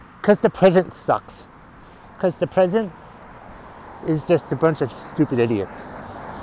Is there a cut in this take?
no; 0 cuts

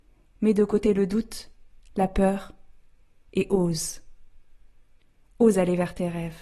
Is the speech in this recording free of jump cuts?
yes; 0 cuts

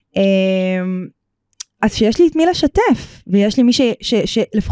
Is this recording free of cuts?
yes; 0 cuts

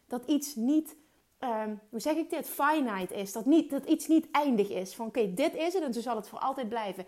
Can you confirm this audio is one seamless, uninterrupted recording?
yes; 0 cuts

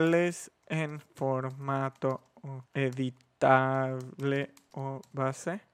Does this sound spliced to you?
yes; 1 cut; at 2.7 s

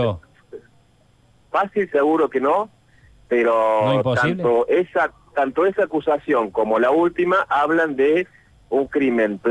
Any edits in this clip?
no; 0 cuts

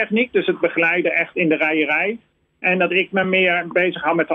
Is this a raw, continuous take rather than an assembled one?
yes; 0 cuts

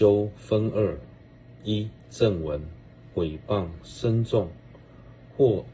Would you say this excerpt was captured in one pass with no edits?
no; 1 cut; at 3.1 s

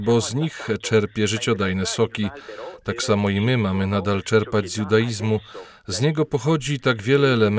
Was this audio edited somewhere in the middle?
no; 0 cuts

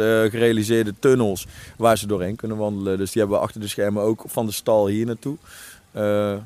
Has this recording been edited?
no; 0 cuts

